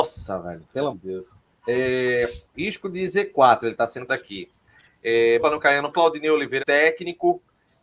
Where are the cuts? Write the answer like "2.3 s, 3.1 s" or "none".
0.9 s, 2.5 s, 4.1 s, 5.4 s, 5.9 s, 6.6 s